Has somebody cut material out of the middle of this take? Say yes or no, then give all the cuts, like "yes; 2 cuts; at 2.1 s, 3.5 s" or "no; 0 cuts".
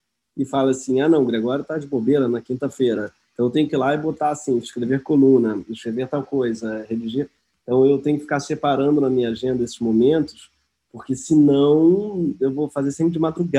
no; 0 cuts